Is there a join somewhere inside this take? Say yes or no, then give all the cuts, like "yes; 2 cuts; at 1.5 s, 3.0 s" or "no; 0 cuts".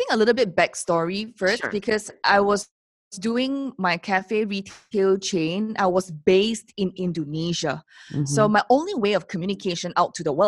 no; 0 cuts